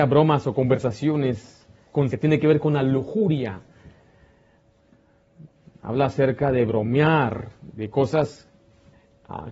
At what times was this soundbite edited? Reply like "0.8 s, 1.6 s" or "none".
2.1 s